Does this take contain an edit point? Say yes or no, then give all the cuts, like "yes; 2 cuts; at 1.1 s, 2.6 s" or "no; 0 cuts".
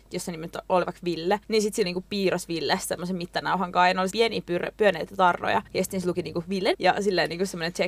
yes; 5 cuts; at 1.4 s, 1.8 s, 4.1 s, 5.7 s, 6.7 s